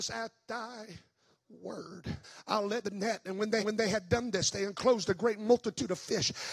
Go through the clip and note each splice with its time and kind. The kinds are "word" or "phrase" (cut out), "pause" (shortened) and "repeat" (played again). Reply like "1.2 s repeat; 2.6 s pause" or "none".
2.2 s pause; 2.8 s word; 3.6 s repeat